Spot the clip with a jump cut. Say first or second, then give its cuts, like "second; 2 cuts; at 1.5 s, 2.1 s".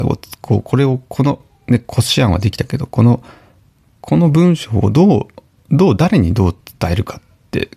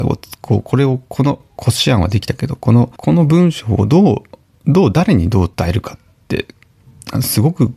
second; 3 cuts; at 1.6 s, 3.0 s, 5.5 s